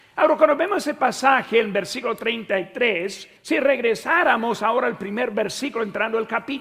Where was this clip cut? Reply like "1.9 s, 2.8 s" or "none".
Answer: 3.4 s